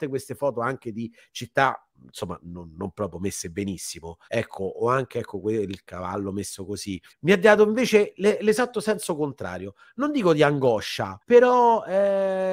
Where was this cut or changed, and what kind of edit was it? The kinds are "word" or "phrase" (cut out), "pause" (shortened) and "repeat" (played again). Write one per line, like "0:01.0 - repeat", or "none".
0:01.9 - pause
0:04.2 - pause
0:07.1 - pause
0:11.2 - pause